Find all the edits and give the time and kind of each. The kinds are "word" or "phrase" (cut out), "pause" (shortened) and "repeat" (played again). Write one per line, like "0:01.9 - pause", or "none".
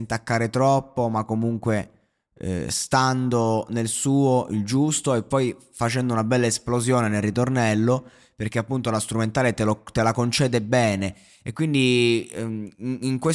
none